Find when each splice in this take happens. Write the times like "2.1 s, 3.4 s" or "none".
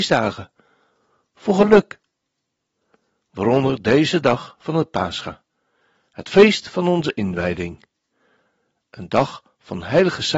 none